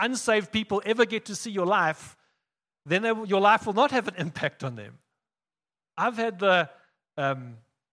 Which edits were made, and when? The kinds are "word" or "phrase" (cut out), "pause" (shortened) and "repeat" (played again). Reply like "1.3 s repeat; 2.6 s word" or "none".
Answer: none